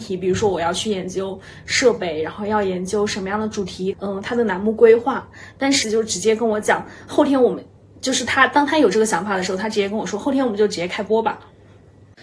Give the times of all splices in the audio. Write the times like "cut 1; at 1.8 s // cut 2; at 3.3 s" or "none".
cut 1; at 3.9 s // cut 2; at 5.8 s